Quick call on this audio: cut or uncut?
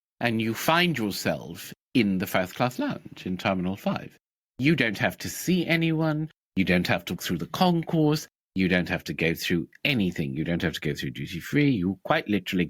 cut